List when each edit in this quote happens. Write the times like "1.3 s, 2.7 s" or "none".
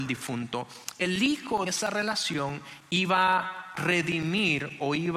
1.0 s, 1.7 s, 3.7 s